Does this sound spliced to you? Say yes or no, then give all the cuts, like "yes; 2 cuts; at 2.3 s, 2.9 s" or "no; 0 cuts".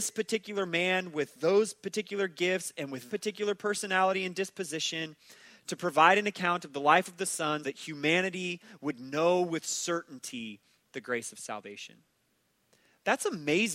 yes; 2 cuts; at 3.1 s, 7.6 s